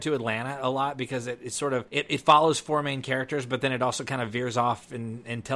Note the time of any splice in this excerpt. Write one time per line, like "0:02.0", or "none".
0:01.9